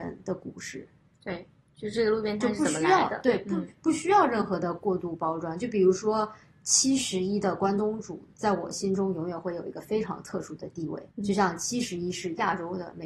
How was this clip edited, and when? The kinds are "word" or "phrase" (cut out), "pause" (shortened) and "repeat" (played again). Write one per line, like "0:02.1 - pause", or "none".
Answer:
0:11.1 - pause